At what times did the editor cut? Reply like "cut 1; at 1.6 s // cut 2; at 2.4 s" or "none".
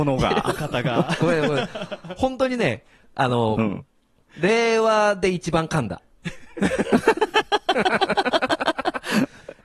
none